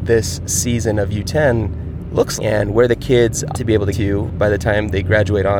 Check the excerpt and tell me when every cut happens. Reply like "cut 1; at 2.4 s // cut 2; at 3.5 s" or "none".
cut 1; at 2.4 s // cut 2; at 3.5 s // cut 3; at 3.9 s